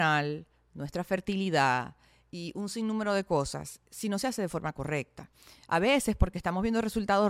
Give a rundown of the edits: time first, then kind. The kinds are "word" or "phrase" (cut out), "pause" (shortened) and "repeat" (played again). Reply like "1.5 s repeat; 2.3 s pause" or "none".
none